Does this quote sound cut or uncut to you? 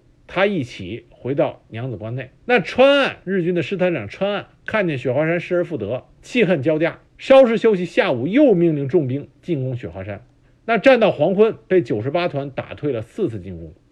cut